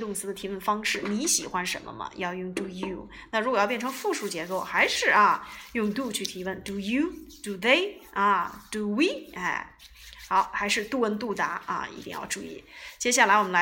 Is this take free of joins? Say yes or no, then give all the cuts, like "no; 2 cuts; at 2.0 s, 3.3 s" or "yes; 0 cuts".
yes; 0 cuts